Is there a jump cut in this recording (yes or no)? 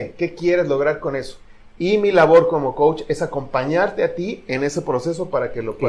no